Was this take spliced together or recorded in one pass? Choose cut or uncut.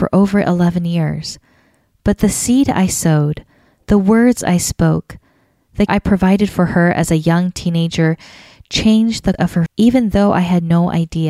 cut